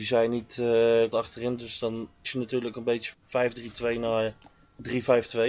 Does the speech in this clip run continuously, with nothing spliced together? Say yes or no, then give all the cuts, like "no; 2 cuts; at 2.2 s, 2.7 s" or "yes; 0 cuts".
no; 4 cuts; at 1.1 s, 2.2 s, 2.7 s, 3.1 s